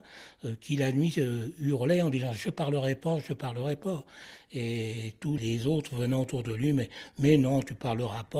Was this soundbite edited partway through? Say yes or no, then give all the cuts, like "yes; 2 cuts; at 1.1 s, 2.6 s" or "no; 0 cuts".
yes; 1 cut; at 5.4 s